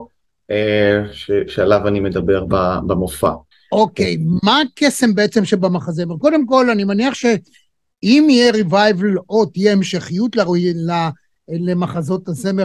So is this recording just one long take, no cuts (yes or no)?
no